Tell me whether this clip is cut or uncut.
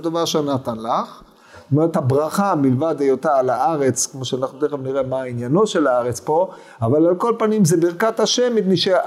uncut